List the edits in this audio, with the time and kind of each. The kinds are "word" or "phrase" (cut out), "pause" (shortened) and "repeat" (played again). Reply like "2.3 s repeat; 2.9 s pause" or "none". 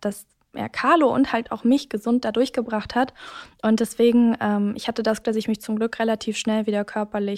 5.2 s word